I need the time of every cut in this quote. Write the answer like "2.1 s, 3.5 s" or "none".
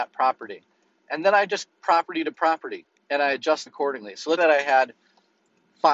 1.7 s, 3.0 s, 3.7 s, 4.4 s